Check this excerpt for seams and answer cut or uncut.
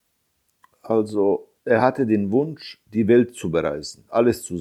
cut